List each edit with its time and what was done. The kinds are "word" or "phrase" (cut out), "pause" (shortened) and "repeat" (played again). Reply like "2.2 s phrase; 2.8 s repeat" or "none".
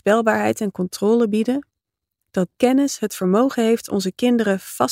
2.6 s word